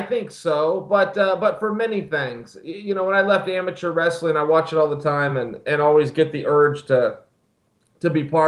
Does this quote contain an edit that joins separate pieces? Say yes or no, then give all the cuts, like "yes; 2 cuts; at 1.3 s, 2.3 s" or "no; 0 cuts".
no; 0 cuts